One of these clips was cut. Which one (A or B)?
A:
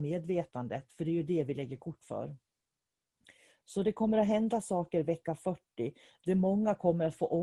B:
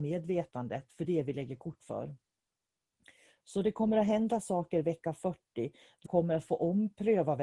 B